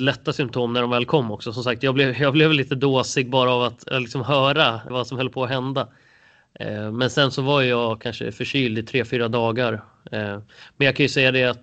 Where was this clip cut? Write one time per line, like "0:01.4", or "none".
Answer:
0:04.9